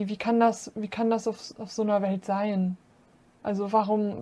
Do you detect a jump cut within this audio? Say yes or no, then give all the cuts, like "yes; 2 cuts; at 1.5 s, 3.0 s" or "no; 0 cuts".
no; 0 cuts